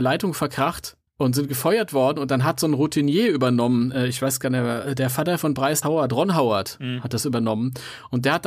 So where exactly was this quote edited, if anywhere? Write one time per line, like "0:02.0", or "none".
0:01.1
0:05.8